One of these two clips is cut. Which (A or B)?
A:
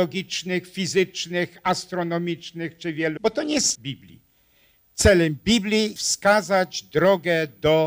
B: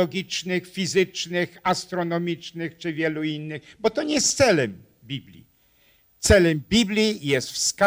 A